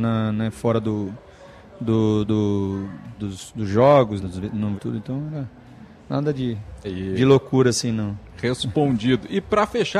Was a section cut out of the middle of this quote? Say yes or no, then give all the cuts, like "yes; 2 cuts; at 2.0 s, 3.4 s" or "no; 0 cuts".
yes; 5 cuts; at 2.3 s, 3.2 s, 4.2 s, 4.8 s, 6.8 s